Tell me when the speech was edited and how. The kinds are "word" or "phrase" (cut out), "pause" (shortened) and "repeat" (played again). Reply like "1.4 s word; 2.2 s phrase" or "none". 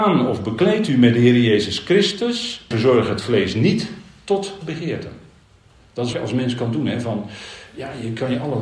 2.7 s word; 5.4 s pause; 6.1 s word